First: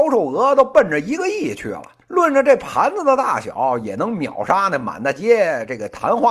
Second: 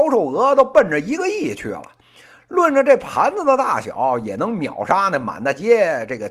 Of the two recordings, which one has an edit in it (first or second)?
first